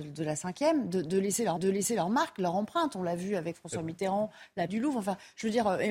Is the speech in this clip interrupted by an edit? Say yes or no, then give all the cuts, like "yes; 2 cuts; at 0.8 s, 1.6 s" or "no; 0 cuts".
yes; 2 cuts; at 1.6 s, 4.7 s